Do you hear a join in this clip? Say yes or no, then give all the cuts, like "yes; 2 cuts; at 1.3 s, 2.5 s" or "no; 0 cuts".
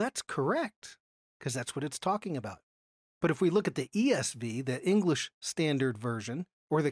no; 0 cuts